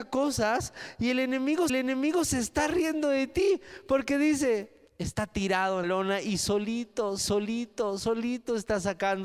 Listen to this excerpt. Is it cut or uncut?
cut